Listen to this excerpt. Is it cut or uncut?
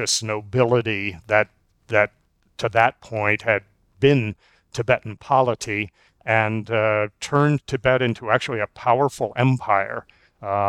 uncut